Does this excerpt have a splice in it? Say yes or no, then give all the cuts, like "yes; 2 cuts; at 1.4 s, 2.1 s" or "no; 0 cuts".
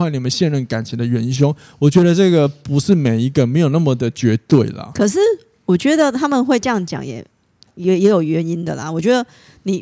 no; 0 cuts